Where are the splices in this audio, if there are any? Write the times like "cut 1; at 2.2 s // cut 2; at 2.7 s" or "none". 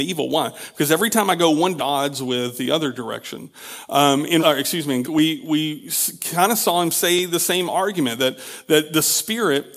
cut 1; at 1.8 s // cut 2; at 4.4 s // cut 3; at 5.0 s

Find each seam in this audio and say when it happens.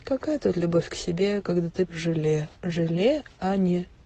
cut 1; at 1.9 s // cut 2; at 2.5 s

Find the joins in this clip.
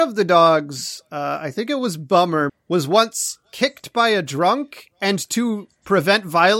cut 1; at 2.5 s

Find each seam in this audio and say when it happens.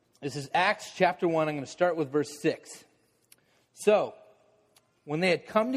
none

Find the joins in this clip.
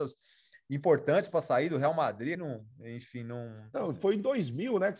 cut 1; at 2.3 s

